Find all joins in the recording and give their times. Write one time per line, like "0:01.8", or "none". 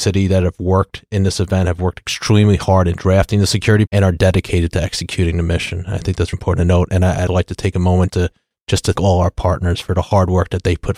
0:03.9
0:06.3
0:07.3
0:08.1
0:09.0
0:09.8